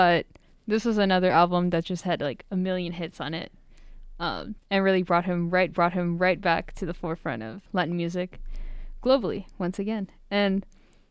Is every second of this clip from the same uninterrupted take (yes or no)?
no